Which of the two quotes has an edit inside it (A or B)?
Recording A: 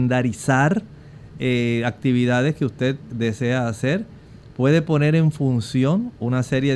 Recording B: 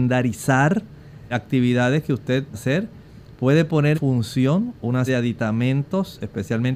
B